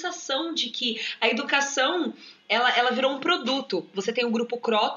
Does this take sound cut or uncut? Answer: uncut